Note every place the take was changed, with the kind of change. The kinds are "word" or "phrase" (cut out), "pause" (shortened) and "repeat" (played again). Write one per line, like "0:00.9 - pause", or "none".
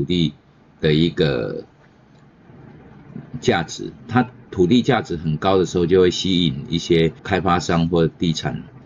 0:04.0 - pause
0:07.2 - pause